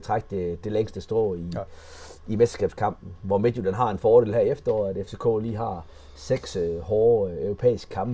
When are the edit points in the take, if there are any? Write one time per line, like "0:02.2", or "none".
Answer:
none